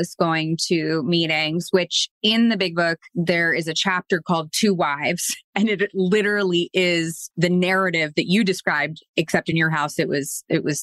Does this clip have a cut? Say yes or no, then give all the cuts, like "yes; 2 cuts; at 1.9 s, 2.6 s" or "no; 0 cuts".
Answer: no; 0 cuts